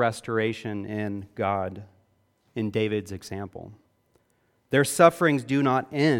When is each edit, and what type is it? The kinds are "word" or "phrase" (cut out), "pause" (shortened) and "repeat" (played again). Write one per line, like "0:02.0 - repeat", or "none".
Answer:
none